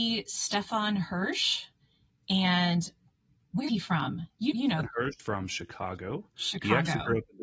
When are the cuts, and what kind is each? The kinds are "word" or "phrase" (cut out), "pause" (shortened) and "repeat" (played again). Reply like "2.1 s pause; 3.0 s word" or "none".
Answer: 3.7 s word; 4.5 s word; 4.8 s word; 5.2 s word